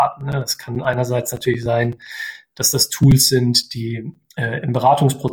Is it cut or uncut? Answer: uncut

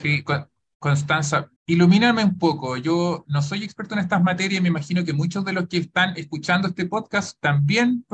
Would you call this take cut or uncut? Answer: cut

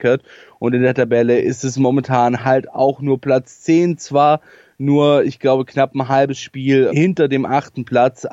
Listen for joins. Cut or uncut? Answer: cut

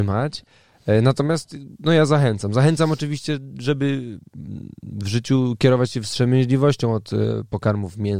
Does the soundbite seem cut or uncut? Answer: uncut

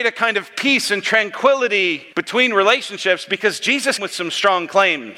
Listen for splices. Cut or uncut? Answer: cut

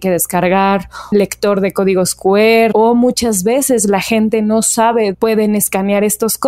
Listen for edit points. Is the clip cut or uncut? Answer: cut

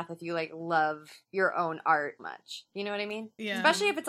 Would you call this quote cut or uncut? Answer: cut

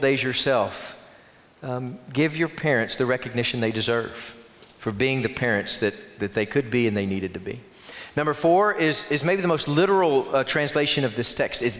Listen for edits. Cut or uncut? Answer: uncut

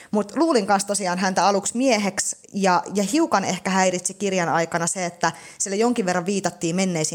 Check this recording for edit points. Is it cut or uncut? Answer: cut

